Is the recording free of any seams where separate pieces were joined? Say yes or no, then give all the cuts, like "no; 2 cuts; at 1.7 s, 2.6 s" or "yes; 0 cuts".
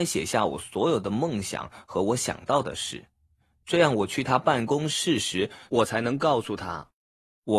yes; 0 cuts